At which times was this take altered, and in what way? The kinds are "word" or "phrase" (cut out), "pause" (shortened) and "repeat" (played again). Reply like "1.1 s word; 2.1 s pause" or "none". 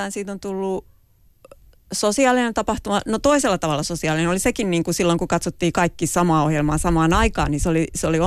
none